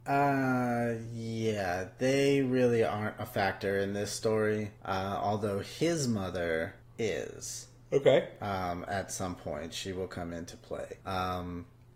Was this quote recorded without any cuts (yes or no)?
no